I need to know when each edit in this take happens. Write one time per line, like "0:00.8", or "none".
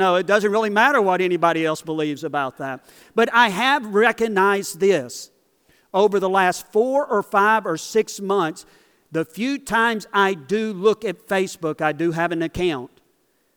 none